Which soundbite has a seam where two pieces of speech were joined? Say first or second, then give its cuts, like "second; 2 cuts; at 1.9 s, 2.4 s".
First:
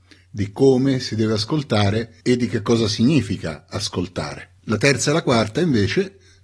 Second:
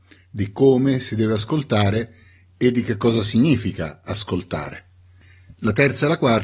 first; 2 cuts; at 2.2 s, 4.6 s